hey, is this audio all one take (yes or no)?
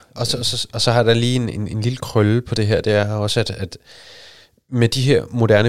yes